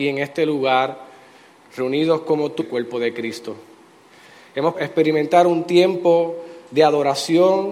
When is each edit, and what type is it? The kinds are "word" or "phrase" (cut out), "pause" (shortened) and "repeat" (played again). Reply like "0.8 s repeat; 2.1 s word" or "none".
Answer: 2.6 s word; 4.7 s word